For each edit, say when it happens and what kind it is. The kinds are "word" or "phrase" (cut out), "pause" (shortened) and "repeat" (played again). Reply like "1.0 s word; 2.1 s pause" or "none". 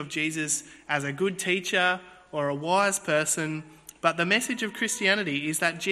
none